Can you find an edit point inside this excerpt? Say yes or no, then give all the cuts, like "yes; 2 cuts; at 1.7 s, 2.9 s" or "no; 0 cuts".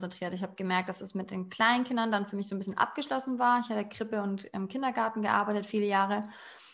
no; 0 cuts